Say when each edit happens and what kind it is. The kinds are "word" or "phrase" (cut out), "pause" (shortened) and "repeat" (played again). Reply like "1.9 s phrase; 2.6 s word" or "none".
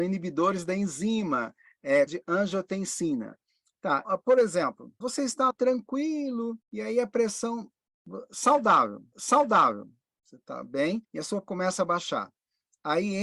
2.1 s word; 4.0 s word; 5.0 s word; 5.5 s word; 6.6 s pause; 9.1 s repeat; 11.0 s pause; 11.4 s word

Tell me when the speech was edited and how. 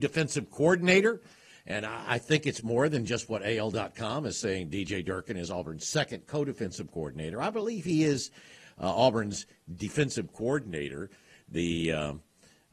none

